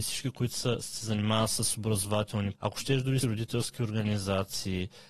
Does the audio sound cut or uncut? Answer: cut